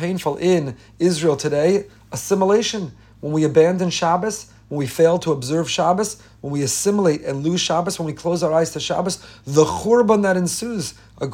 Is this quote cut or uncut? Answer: uncut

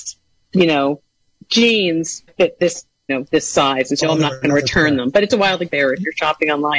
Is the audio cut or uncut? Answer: cut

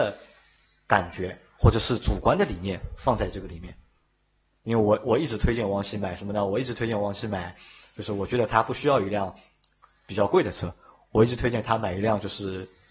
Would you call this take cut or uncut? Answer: uncut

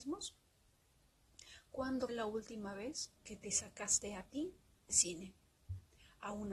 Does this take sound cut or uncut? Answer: cut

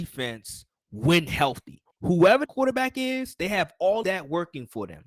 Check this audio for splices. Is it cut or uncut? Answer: cut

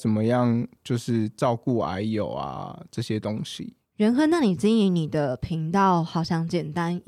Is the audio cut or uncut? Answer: uncut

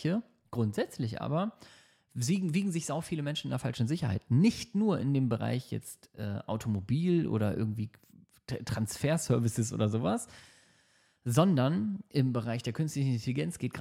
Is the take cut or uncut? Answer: uncut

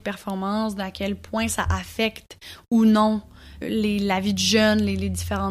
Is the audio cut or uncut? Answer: cut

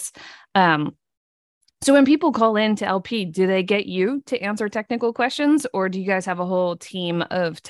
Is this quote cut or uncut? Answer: uncut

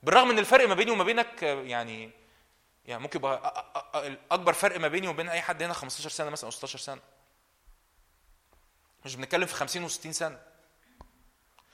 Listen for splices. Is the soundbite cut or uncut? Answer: uncut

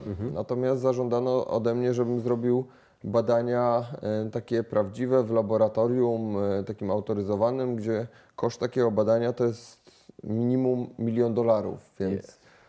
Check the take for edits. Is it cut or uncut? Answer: uncut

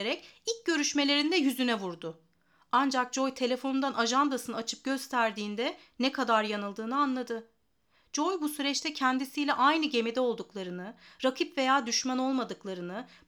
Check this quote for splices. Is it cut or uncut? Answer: uncut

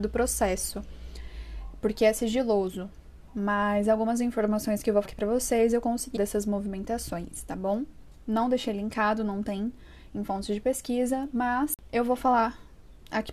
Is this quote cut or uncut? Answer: cut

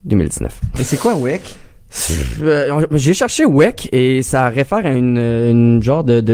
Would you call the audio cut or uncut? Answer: uncut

